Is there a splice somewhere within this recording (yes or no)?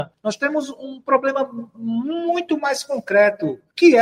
no